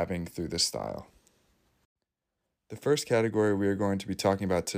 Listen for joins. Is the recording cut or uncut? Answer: uncut